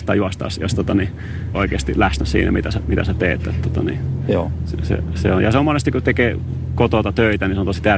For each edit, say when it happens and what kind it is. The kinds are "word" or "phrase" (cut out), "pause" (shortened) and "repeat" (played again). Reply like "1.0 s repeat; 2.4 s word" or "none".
1.5 s phrase